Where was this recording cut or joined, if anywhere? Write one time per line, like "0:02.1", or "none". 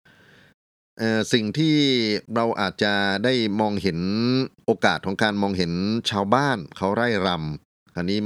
0:02.2
0:04.6

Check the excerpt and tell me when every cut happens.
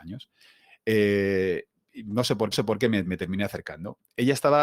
0:02.5
0:03.0

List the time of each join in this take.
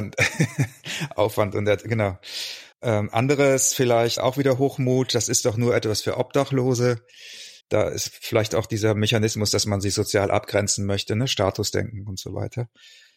0:02.7
0:04.2
0:07.6

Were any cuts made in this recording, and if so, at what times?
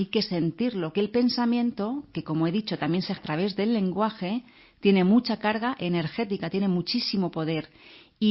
0:00.9
0:03.2

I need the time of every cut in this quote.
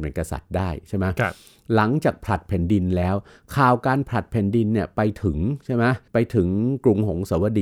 0:06.1

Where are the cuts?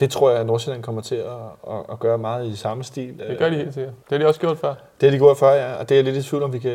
0:04.0

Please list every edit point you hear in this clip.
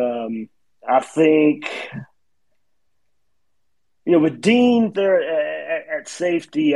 0:04.9

